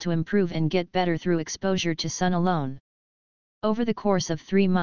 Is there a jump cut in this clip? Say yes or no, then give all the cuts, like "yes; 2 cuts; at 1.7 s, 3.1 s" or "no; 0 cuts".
no; 0 cuts